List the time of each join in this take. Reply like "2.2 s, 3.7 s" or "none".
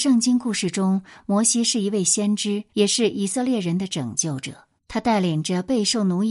2.7 s, 4.8 s